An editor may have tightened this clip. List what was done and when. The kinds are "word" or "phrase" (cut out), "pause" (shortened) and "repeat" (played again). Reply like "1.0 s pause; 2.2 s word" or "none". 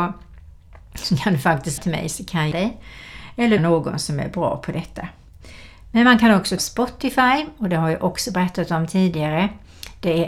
1.8 s word; 2.5 s word; 3.6 s word; 6.6 s word